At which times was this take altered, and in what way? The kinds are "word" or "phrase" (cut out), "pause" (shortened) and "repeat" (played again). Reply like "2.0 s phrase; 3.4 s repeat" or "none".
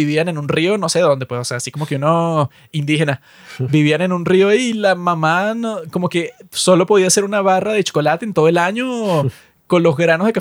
none